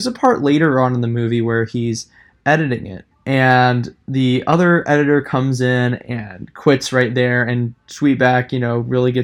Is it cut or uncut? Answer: uncut